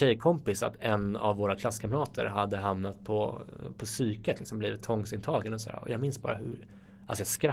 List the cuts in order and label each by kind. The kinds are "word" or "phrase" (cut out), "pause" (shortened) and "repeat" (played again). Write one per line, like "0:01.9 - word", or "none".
none